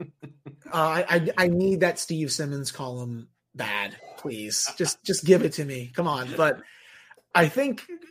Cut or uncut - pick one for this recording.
uncut